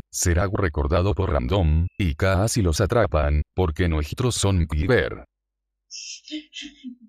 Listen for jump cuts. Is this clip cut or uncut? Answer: cut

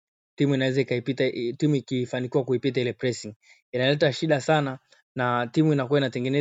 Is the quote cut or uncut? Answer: uncut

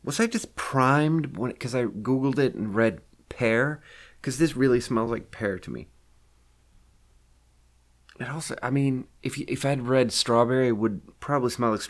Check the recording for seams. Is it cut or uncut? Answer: uncut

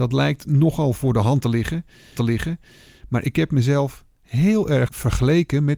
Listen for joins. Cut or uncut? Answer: cut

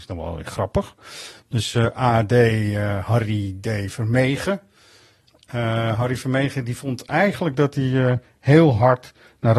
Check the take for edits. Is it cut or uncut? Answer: uncut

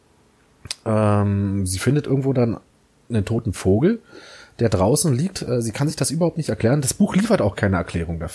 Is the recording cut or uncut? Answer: uncut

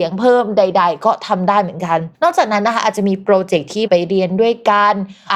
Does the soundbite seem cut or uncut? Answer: cut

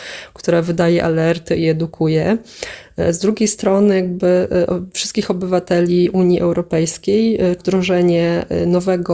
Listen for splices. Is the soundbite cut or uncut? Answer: cut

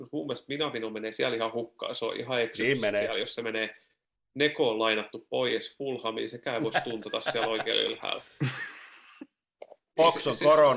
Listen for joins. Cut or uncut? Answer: uncut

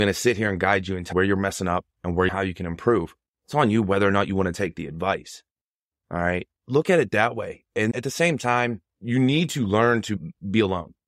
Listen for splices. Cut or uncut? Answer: cut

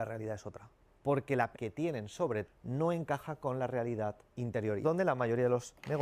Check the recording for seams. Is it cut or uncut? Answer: cut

